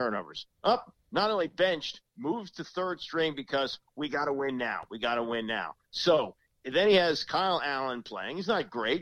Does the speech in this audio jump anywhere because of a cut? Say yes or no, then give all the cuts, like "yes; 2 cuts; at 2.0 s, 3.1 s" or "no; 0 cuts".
no; 0 cuts